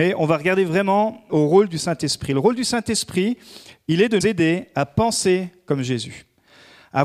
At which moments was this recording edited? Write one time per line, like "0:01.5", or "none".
0:01.3
0:04.2